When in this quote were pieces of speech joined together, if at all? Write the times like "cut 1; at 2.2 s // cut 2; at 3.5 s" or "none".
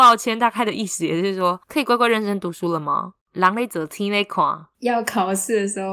cut 1; at 1.6 s